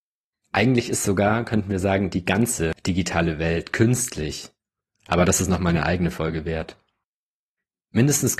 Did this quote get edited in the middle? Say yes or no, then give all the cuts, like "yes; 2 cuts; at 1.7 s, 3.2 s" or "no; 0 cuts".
no; 0 cuts